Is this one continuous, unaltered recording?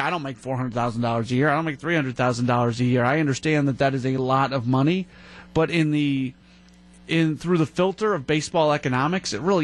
yes; 0 cuts

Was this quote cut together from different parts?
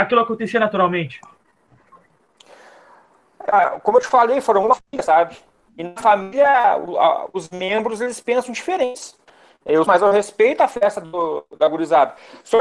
yes; 1 cut; at 9.9 s

